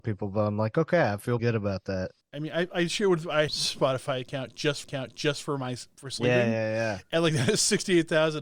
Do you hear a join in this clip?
yes; 4 cuts; at 1.4 s, 2.2 s, 3.5 s, 4.8 s

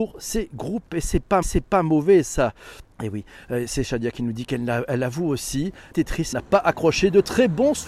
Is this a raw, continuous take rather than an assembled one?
no; 4 cuts; at 1.4 s, 2.9 s, 5.9 s, 6.3 s

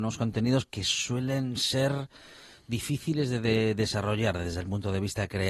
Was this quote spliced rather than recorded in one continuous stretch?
no; 0 cuts

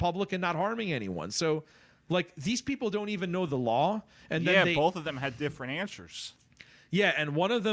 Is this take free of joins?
yes; 0 cuts

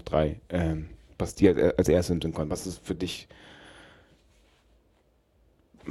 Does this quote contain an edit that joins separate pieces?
no; 0 cuts

